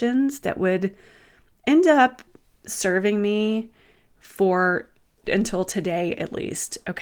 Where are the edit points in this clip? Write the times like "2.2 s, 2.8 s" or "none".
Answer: none